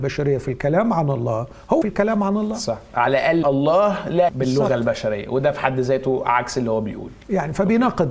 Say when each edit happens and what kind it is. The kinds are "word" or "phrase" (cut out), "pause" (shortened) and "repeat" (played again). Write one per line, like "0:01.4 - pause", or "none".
0:01.8 - phrase
0:03.4 - phrase
0:04.3 - word

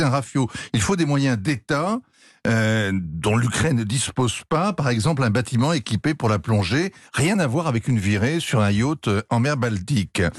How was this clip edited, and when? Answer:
none

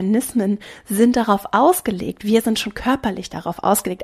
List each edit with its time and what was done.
none

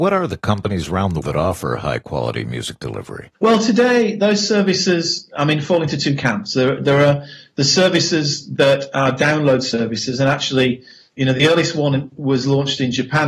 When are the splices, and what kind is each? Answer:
0:01.2 - word

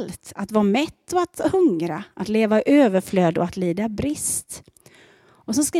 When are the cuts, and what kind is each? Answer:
none

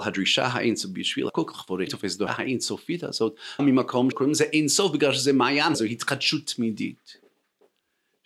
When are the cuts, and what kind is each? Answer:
0:01.3 - word
0:01.9 - word
0:02.3 - word
0:03.6 - word
0:04.1 - word
0:05.7 - word

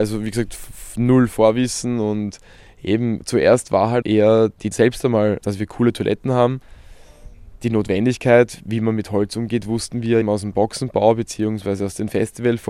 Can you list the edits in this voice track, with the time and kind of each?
0:03.2 - word
0:04.0 - word
0:04.7 - word
0:10.2 - word

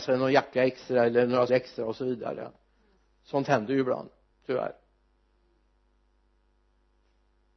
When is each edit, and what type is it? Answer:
0:01.5 - word
0:03.0 - pause
0:04.3 - pause

